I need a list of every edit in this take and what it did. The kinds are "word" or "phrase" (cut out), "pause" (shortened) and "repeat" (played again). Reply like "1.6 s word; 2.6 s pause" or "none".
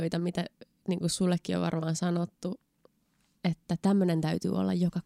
none